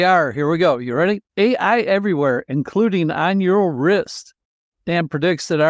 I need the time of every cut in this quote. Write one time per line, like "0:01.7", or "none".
0:01.3